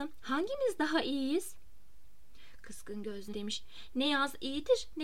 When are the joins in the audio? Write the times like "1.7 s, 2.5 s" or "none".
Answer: 3.3 s